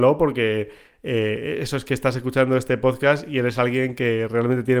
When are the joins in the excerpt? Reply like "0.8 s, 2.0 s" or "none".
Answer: none